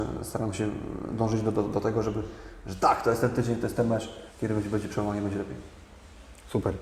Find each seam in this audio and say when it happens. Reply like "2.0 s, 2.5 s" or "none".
4.3 s